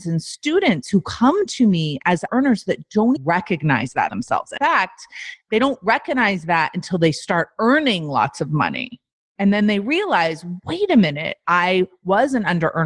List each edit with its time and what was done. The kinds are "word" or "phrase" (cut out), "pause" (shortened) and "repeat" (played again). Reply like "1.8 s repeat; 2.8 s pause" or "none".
2.3 s word; 3.2 s word; 4.1 s word; 4.6 s word